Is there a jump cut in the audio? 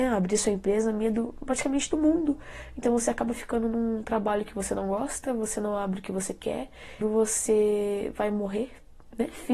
yes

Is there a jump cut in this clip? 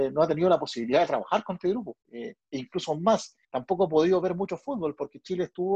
yes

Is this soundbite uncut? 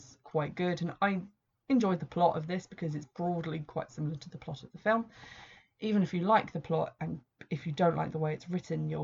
yes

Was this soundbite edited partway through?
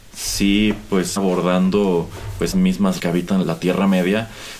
yes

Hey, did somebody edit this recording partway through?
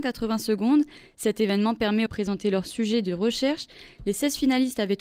yes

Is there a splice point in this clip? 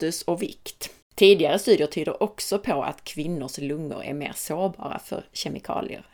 yes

